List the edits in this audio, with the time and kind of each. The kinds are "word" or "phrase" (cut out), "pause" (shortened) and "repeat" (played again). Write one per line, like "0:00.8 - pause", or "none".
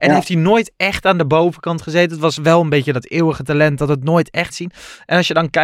0:04.5 - word